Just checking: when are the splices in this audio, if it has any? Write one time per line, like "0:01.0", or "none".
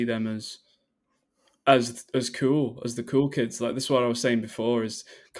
none